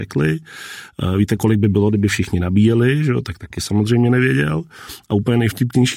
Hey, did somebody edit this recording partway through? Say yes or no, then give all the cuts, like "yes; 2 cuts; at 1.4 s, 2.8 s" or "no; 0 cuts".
no; 0 cuts